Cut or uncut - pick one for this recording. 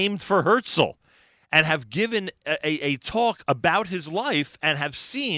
uncut